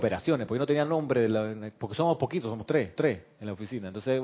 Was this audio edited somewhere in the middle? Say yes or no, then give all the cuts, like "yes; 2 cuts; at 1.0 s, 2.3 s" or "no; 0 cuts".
yes; 1 cut; at 3.0 s